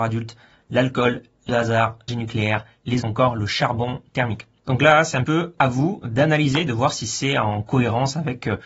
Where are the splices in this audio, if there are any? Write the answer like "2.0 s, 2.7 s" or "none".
1.5 s, 2.1 s, 3.0 s, 5.2 s